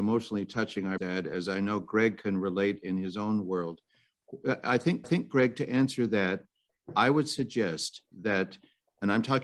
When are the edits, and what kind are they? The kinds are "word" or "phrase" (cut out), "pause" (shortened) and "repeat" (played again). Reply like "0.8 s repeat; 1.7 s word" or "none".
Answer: 1.0 s word; 5.0 s repeat